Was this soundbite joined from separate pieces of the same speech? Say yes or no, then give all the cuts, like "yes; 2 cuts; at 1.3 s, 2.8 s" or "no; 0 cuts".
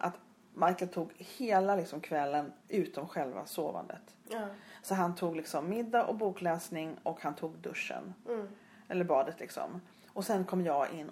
no; 0 cuts